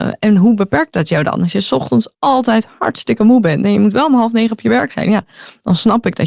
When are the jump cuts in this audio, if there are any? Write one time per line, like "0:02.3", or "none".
0:02.1